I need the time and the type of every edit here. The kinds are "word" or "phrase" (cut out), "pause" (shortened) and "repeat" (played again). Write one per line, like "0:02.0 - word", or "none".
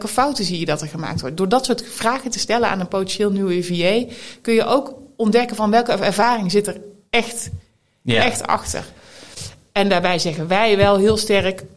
none